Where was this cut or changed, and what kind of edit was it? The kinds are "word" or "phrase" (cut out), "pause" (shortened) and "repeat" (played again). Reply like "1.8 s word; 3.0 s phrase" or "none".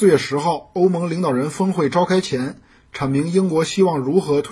none